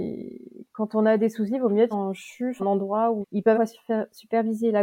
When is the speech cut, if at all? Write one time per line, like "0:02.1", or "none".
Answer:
0:01.9
0:02.6
0:03.2
0:03.5